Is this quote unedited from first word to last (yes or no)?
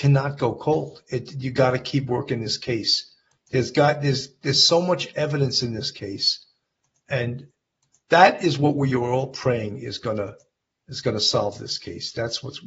yes